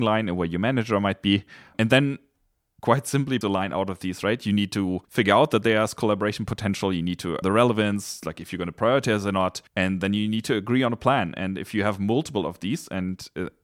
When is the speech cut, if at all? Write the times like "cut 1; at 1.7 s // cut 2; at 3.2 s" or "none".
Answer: cut 1; at 2.8 s // cut 2; at 3.4 s // cut 3; at 5.0 s // cut 4; at 7.4 s // cut 5; at 9.7 s